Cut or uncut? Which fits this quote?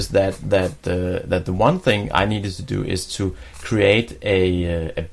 uncut